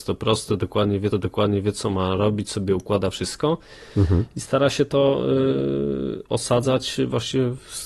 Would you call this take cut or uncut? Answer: cut